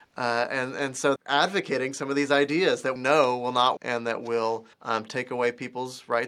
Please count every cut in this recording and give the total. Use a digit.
4